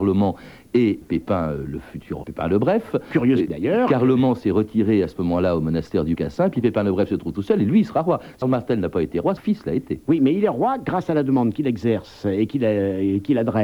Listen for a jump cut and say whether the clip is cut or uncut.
cut